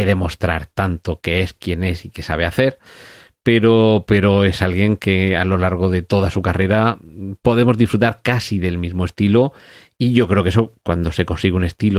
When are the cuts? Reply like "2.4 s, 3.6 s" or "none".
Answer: none